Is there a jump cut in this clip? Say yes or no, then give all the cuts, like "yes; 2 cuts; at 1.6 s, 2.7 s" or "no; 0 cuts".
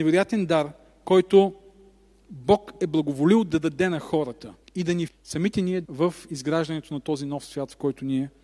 yes; 3 cuts; at 4.6 s, 5.1 s, 5.8 s